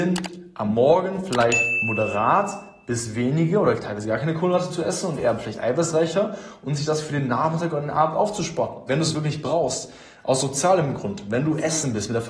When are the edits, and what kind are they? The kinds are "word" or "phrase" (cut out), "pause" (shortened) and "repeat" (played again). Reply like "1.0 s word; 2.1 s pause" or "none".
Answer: none